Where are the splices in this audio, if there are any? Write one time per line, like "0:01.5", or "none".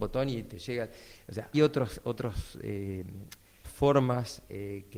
0:01.5
0:03.6

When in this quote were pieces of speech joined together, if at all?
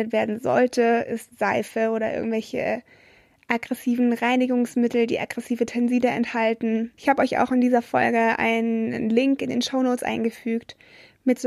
none

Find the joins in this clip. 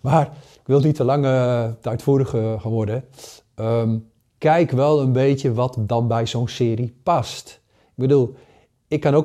0:04.2

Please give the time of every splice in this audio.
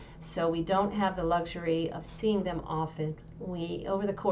none

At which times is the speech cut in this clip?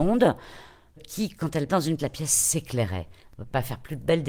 0:01.0
0:01.7
0:02.0

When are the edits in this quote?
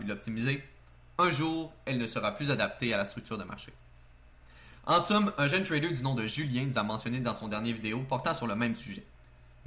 none

